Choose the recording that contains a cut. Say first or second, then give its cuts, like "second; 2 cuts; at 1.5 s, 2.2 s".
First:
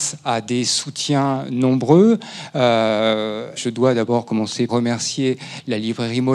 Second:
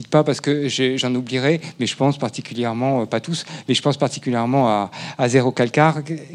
first; 2 cuts; at 3.6 s, 4.7 s